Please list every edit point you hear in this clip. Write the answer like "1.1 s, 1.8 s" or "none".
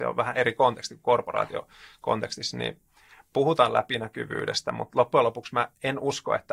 none

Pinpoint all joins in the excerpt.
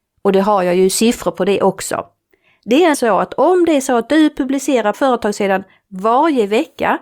2.9 s, 4.9 s

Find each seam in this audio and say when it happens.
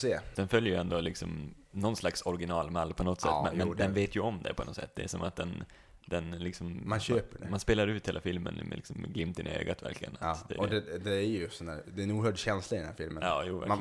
none

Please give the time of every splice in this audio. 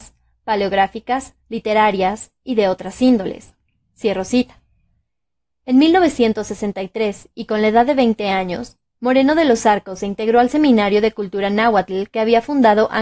1.4 s

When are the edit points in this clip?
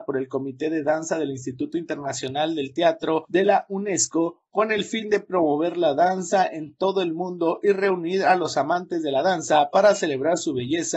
none

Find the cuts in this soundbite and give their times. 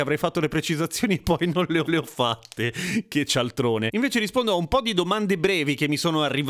1.9 s

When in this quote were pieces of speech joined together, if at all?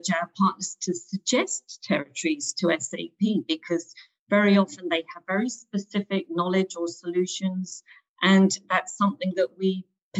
none

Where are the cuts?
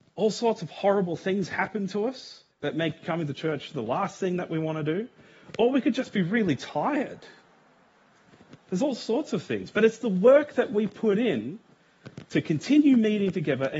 2.5 s, 8.6 s

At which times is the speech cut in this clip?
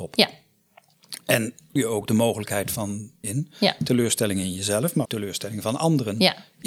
1.8 s, 3.2 s, 5.0 s

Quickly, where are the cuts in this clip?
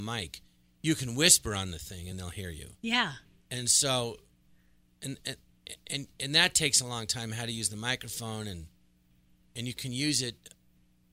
none

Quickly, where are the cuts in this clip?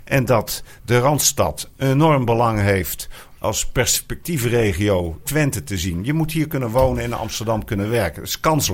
3.4 s, 5.2 s

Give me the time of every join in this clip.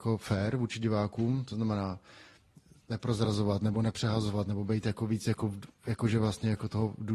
none

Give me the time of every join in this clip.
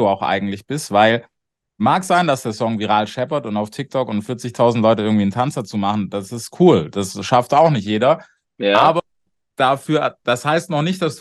none

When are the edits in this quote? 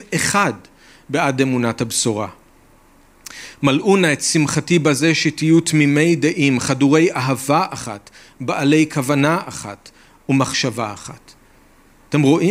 none

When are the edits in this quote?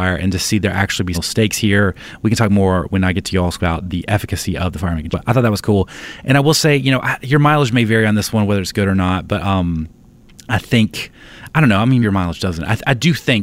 1.1 s, 3.6 s, 5.1 s, 12.0 s

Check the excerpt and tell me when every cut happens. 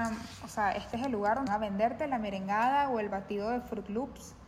1.5 s

